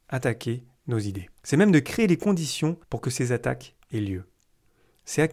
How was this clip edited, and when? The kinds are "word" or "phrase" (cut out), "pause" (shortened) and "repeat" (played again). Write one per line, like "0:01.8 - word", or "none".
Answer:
0:01.4 - pause
0:02.8 - pause